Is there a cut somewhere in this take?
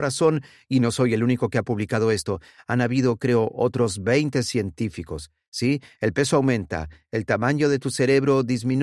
no; 0 cuts

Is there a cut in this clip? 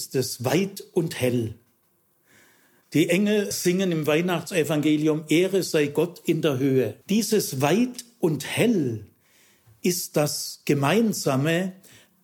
yes; 2 cuts; at 3.5 s, 7.0 s

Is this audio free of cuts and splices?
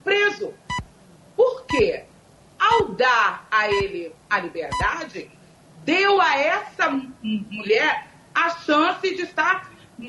yes; 0 cuts

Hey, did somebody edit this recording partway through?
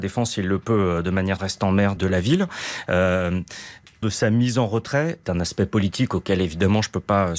yes; 4 cuts; at 1.4 s, 2.0 s, 4.0 s, 5.2 s

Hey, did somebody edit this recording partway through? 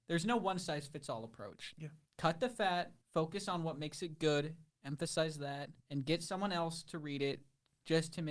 yes; 3 cuts; at 2.1 s, 3.0 s, 5.8 s

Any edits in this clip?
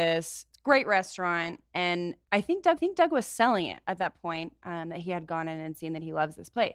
yes; 1 cut; at 2.8 s

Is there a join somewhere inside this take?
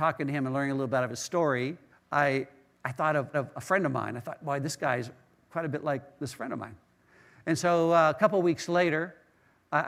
yes; 2 cuts; at 1.9 s, 3.3 s

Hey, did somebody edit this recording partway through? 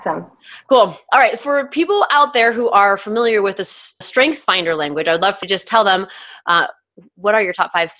yes; 3 cuts; at 1.4 s, 4.0 s, 5.4 s

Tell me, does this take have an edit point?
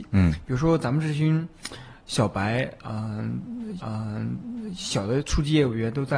yes; 1 cut; at 3.8 s

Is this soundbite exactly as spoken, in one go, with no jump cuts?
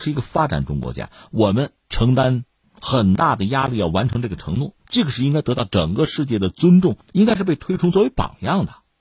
no; 2 cuts; at 4.8 s, 7.0 s

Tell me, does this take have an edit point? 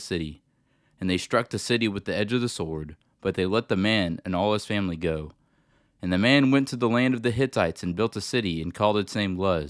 no; 0 cuts

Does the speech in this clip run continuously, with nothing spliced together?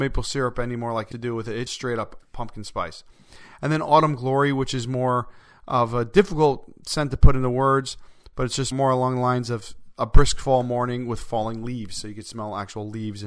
no; 3 cuts; at 1.1 s, 1.7 s, 8.7 s

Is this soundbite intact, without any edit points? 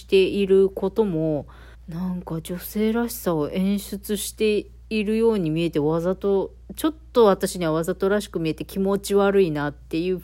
no; 1 cut; at 1.7 s

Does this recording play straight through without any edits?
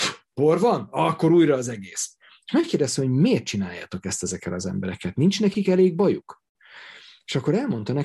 yes; 0 cuts

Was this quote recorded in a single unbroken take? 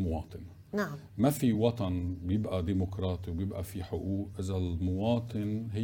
yes; 0 cuts

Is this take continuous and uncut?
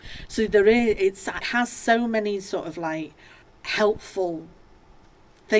no; 2 cuts; at 1.4 s, 3.4 s

